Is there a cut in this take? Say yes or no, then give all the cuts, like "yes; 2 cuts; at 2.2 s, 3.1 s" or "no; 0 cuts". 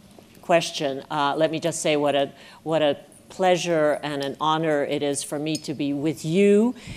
no; 0 cuts